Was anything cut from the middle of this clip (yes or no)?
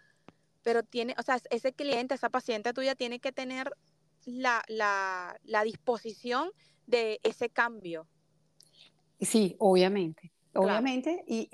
no